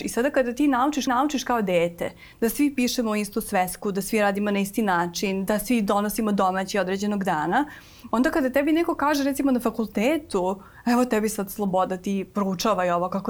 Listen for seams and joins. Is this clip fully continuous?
no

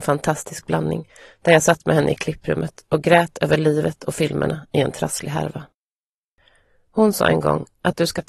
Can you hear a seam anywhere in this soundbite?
no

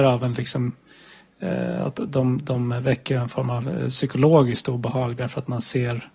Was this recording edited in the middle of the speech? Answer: no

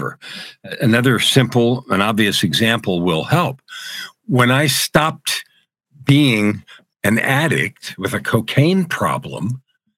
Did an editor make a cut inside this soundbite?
no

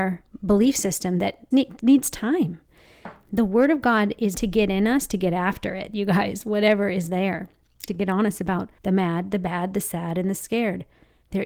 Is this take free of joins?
no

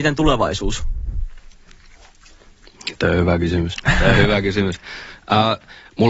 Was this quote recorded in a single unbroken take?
yes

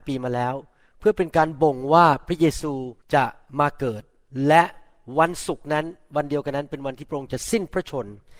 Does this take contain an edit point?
yes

